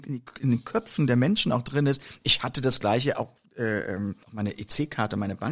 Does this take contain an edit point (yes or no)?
yes